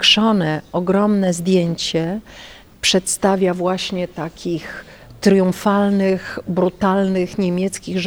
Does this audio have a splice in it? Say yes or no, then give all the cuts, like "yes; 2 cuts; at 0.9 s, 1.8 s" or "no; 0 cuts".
no; 0 cuts